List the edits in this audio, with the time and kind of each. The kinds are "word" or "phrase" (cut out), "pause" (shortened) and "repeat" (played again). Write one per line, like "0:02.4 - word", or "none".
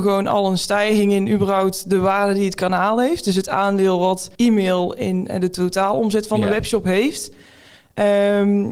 0:04.3 - pause